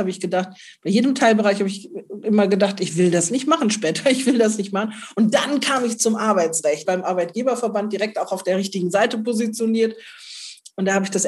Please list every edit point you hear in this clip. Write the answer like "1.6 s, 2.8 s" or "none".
6.8 s